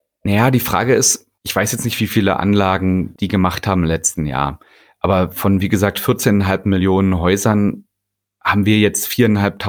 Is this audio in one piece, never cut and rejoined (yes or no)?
no